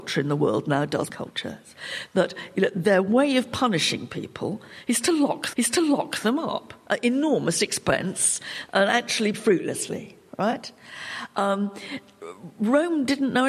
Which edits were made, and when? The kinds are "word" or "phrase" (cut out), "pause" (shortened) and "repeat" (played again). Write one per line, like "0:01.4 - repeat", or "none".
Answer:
0:01.1 - phrase
0:05.5 - repeat
0:09.3 - word